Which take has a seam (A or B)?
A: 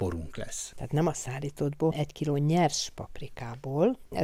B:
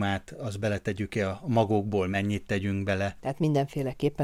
A